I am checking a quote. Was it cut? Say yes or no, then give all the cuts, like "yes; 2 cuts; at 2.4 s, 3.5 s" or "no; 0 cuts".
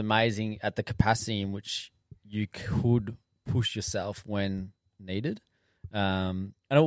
no; 0 cuts